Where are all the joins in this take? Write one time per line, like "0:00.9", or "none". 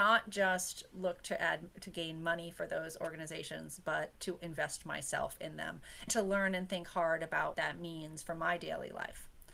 0:04.4
0:06.1
0:07.5